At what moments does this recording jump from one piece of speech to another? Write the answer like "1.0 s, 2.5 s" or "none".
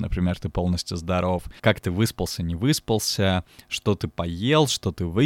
1.6 s